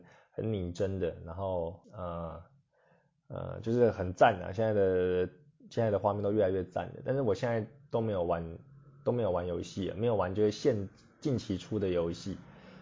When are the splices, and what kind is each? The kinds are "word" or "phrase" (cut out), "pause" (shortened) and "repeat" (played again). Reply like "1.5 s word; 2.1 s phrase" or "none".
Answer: 1.8 s pause